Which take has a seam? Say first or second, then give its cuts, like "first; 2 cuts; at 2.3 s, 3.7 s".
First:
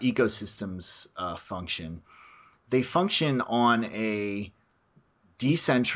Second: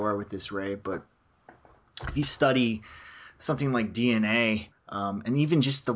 second; 1 cut; at 4.7 s